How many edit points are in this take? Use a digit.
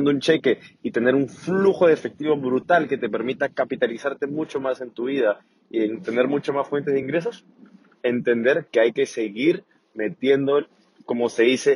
0